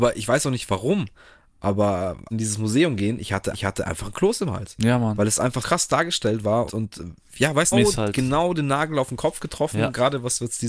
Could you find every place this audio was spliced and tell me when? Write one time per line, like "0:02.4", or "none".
0:02.3
0:03.5
0:05.6
0:06.7
0:07.7